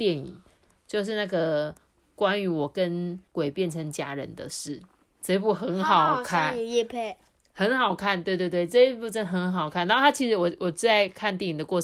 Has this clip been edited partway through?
yes; 1 cut; at 3.3 s

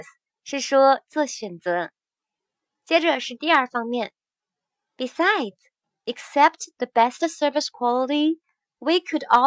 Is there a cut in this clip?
no; 0 cuts

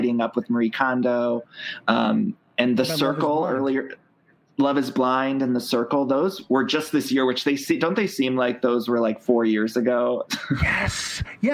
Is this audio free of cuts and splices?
yes; 0 cuts

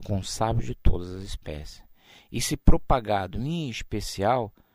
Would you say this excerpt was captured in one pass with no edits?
yes; 0 cuts

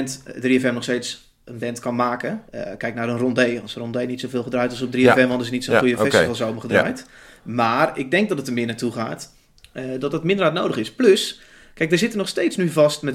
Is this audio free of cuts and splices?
no; 1 cut; at 2.5 s

